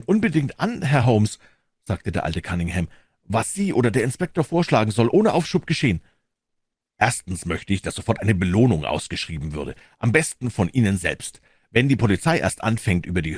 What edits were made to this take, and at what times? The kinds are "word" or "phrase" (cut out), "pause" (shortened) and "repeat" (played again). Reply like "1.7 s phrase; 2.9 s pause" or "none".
none